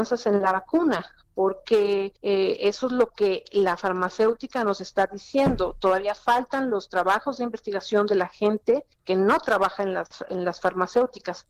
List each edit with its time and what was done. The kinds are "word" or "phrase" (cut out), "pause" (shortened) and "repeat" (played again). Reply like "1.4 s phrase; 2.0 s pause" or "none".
2.2 s pause; 8.9 s pause